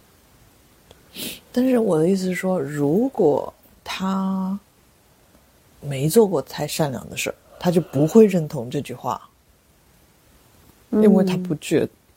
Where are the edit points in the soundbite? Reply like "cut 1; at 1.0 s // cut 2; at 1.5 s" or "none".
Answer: none